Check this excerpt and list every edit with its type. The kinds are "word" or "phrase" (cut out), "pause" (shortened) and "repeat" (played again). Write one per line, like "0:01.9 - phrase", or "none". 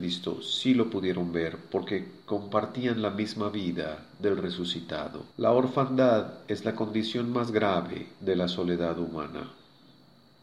0:05.3 - pause